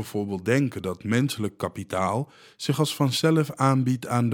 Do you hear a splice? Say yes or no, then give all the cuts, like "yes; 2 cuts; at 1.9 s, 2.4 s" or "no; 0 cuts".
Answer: no; 0 cuts